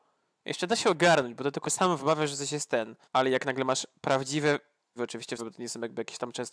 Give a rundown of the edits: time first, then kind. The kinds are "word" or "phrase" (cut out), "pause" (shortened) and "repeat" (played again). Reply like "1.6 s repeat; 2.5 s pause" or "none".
1.6 s word; 3.0 s pause; 5.0 s word; 5.4 s word